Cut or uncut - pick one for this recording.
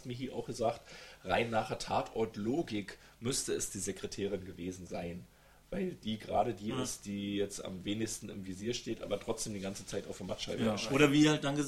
uncut